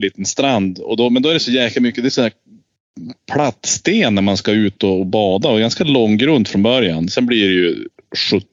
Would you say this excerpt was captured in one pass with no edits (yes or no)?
yes